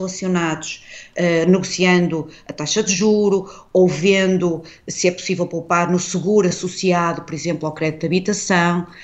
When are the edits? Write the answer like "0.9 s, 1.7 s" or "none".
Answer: none